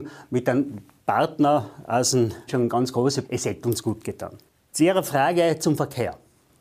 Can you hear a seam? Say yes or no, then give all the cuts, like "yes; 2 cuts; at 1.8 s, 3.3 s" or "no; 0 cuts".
yes; 3 cuts; at 2.5 s, 3.2 s, 4.5 s